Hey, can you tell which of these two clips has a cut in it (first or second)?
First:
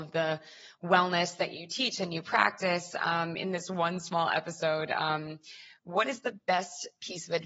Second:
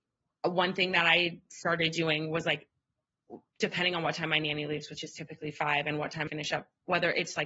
second